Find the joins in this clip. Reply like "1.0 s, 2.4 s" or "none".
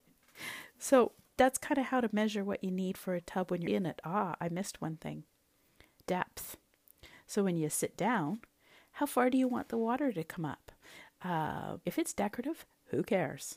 3.7 s, 11.8 s